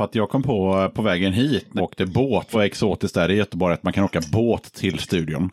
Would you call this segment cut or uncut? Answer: cut